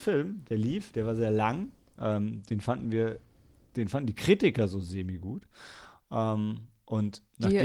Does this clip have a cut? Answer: no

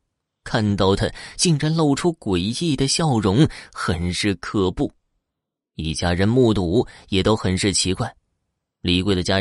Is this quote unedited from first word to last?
yes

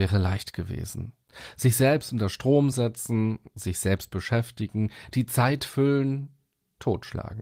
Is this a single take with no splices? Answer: yes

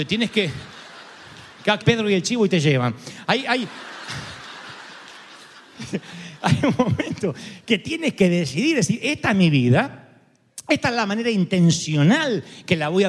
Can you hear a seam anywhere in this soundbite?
yes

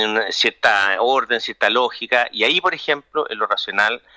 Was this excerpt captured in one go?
yes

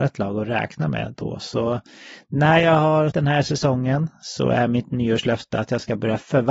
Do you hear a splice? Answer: yes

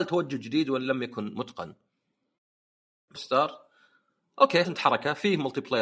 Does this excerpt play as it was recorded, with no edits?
no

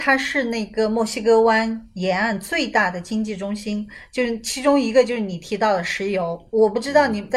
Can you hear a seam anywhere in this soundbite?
no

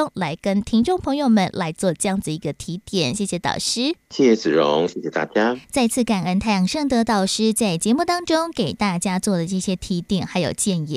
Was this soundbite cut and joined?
yes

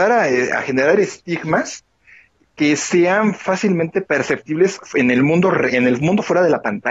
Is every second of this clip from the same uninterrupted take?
yes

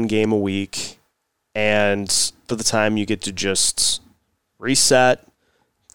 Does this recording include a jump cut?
yes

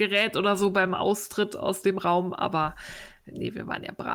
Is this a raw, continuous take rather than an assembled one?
yes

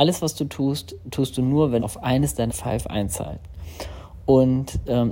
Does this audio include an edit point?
yes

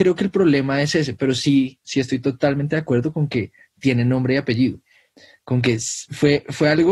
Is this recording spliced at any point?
no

